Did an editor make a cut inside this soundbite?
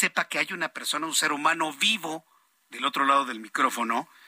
no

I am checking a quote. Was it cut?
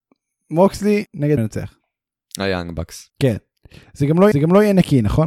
yes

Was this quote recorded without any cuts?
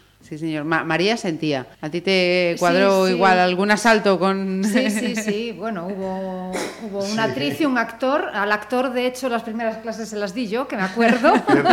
no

